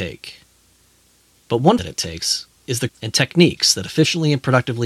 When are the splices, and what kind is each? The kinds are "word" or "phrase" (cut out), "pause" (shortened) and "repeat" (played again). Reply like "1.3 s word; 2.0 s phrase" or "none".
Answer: 1.8 s word; 2.5 s pause; 2.9 s phrase